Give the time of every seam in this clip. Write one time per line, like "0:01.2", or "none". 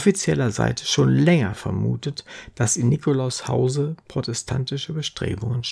none